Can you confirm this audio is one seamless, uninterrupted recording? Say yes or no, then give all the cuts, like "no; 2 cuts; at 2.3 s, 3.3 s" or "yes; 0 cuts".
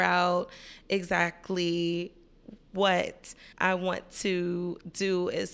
no; 1 cut; at 3.5 s